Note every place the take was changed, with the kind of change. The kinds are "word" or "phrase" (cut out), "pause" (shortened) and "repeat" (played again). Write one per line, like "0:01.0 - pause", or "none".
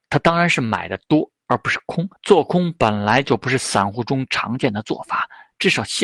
0:02.2 - pause